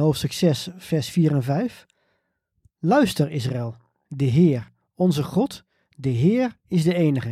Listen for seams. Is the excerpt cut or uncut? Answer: uncut